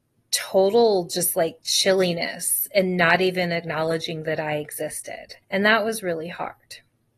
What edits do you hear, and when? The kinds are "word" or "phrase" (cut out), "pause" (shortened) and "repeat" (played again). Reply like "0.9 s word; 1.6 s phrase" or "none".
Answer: 5.4 s pause